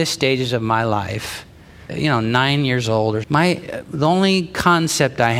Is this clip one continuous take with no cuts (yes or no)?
no